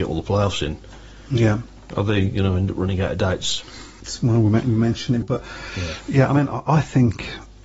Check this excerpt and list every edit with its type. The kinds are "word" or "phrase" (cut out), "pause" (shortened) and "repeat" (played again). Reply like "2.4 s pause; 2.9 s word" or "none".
5.2 s word